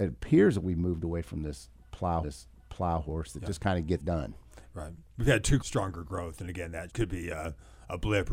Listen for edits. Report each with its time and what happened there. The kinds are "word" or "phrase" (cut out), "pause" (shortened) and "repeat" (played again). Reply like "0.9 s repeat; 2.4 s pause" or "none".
2.2 s repeat; 4.0 s word; 5.6 s phrase; 6.9 s word